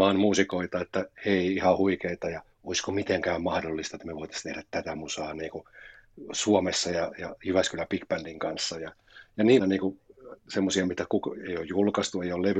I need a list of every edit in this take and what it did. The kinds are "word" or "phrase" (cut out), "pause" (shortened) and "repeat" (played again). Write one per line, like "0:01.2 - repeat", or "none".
0:02.5 - pause
0:09.6 - phrase